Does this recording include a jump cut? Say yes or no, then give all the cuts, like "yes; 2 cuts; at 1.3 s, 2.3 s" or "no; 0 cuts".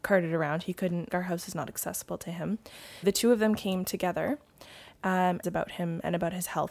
yes; 3 cuts; at 1.1 s, 3.0 s, 5.4 s